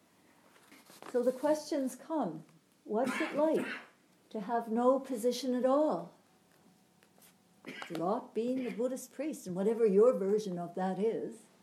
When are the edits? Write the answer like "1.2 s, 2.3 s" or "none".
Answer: none